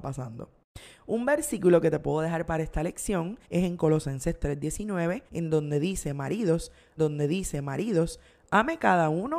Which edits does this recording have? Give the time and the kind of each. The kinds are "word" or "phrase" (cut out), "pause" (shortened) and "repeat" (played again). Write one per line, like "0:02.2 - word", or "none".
0:03.4 - pause
0:05.3 - pause
0:07.0 - repeat